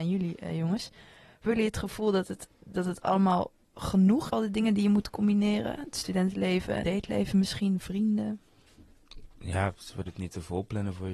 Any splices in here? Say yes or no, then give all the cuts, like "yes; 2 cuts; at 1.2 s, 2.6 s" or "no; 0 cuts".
yes; 5 cuts; at 1.5 s, 2.5 s, 4.3 s, 6.8 s, 10.1 s